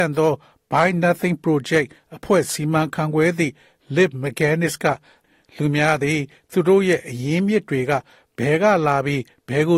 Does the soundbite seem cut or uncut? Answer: uncut